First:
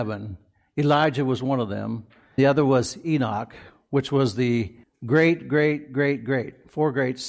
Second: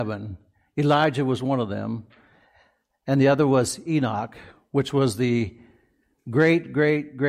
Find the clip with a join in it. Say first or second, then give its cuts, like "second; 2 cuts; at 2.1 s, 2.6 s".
first; 2 cuts; at 2.4 s, 4.8 s